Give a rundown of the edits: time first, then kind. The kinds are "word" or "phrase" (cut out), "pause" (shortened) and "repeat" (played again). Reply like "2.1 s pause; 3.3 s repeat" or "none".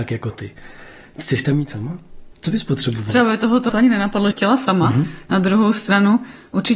2.3 s pause; 3.7 s word; 4.3 s phrase